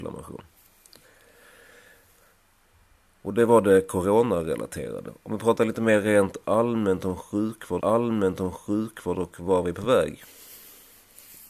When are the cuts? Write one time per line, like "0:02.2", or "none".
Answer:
0:07.8